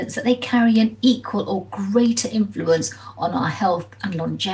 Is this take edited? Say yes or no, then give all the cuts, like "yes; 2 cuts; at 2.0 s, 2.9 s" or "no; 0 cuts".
no; 0 cuts